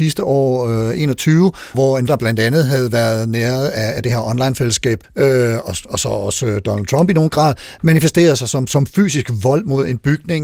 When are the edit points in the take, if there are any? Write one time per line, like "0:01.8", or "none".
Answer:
0:01.7
0:02.1
0:05.0